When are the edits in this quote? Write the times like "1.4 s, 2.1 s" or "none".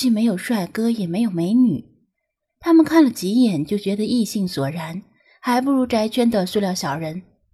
none